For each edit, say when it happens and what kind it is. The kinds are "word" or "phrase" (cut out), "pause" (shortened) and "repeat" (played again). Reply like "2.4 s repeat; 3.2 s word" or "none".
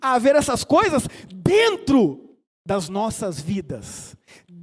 2.4 s pause